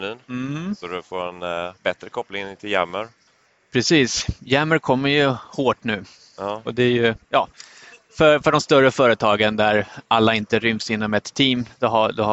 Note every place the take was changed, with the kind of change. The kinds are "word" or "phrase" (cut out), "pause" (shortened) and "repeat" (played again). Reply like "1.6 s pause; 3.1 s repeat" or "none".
1.8 s pause; 3.3 s pause

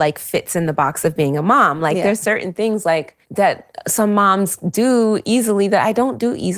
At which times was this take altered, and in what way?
3.2 s pause

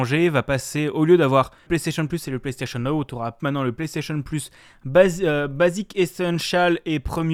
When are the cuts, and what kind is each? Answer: 1.7 s word; 3.4 s word

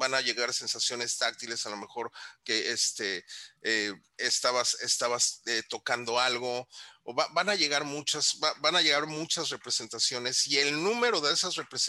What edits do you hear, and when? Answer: none

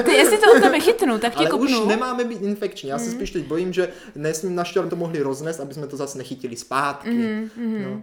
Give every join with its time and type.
4.9 s phrase

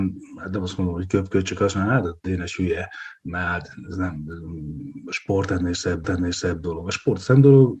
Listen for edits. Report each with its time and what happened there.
6.0 s repeat

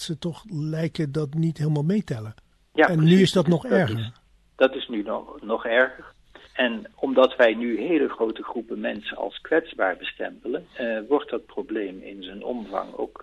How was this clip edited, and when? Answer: 2.5 s pause; 6.5 s pause; 10.7 s pause

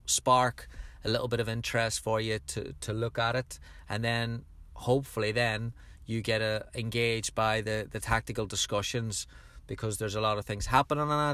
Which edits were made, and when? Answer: none

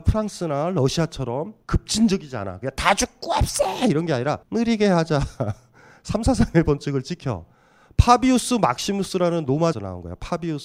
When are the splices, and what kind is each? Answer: 1.6 s pause; 4.4 s pause; 9.7 s word

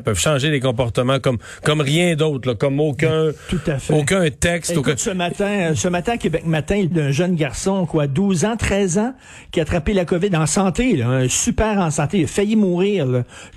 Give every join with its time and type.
6.9 s word

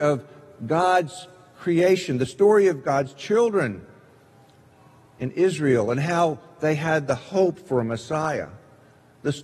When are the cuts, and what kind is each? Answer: none

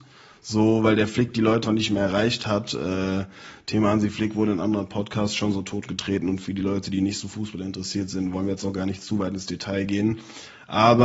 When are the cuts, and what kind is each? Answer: 1.6 s word

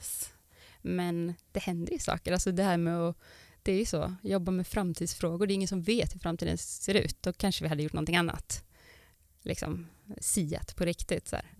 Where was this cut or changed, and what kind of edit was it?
none

